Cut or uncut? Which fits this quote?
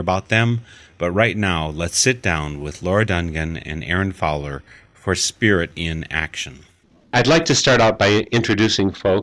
uncut